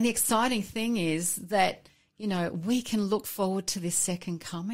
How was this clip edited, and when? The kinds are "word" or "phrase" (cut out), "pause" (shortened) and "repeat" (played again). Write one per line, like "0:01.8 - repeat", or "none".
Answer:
none